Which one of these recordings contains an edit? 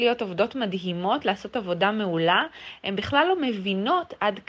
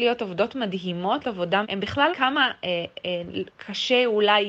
second; 3 cuts; at 1.2 s, 1.6 s, 2.1 s

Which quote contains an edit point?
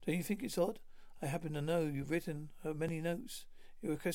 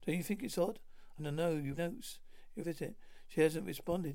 second; 3 cuts; at 1.2 s, 1.8 s, 2.6 s

